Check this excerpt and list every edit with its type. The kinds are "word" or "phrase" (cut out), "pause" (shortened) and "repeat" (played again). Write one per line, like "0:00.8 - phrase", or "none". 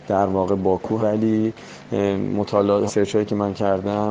0:01.0 - word
0:02.9 - word